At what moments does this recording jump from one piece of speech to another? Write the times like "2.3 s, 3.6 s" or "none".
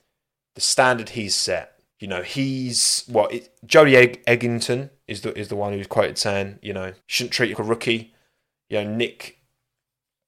1.9 s, 7.0 s, 7.5 s